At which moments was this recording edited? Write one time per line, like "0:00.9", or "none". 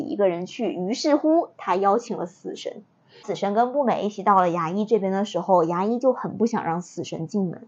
none